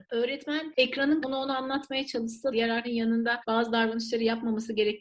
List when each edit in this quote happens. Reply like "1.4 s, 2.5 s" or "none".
1.2 s, 2.5 s, 2.8 s